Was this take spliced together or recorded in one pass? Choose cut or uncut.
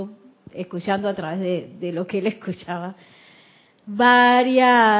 uncut